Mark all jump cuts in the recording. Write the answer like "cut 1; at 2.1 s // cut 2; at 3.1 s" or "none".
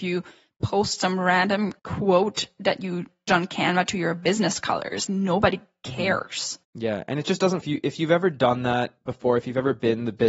cut 1; at 1.8 s // cut 2; at 3.3 s // cut 3; at 5.1 s // cut 4; at 6.6 s // cut 5; at 7.6 s